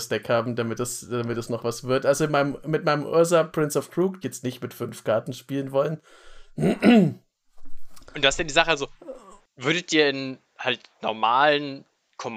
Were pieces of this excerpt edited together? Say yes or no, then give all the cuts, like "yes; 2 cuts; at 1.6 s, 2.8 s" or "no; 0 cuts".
yes; 1 cut; at 4.2 s